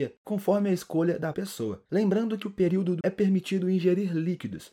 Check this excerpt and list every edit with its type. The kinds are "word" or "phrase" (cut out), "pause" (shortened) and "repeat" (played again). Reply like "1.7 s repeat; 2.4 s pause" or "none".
1.3 s word; 2.4 s word; 3.0 s word